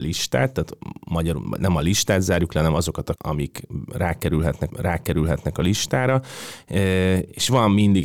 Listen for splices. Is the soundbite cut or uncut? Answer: cut